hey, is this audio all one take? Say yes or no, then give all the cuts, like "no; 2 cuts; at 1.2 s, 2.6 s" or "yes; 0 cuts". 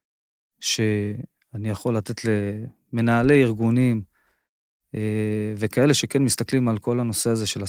yes; 0 cuts